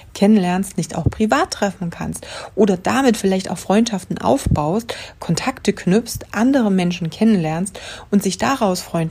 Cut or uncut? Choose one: uncut